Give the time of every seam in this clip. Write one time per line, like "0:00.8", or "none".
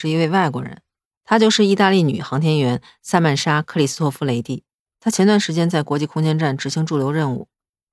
none